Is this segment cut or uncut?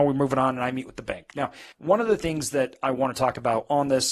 cut